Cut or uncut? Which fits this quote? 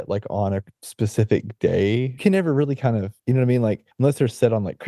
cut